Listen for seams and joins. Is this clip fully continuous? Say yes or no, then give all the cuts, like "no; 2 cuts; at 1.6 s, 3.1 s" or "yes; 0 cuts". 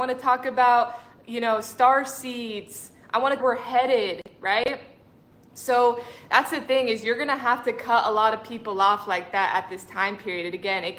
no; 1 cut; at 3.4 s